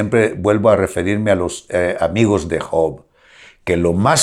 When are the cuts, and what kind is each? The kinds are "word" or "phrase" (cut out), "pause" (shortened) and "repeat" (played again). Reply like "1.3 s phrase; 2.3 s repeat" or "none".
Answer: none